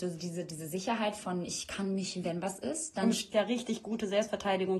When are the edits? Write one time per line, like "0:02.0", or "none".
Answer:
0:02.2
0:03.3